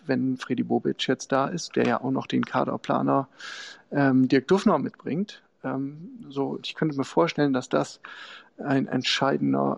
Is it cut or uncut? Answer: uncut